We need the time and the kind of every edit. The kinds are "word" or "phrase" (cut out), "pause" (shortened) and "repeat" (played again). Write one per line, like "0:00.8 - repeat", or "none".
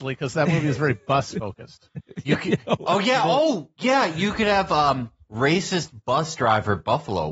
none